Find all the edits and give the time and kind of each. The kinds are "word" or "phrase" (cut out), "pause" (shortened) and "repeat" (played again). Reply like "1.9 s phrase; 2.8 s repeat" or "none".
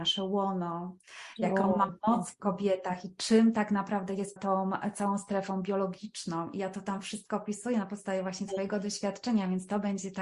4.4 s word